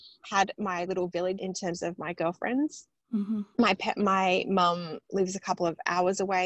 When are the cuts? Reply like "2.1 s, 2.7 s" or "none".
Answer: 1.4 s